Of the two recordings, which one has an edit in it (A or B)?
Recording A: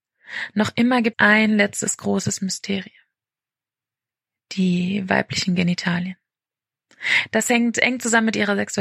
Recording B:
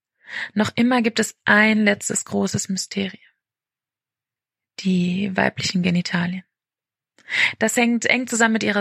A